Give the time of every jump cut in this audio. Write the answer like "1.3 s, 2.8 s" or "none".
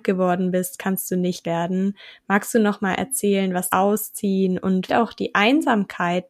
1.4 s, 3.7 s, 4.9 s